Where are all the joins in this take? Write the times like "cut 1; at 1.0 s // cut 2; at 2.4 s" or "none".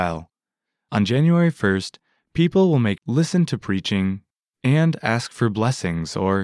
cut 1; at 3.0 s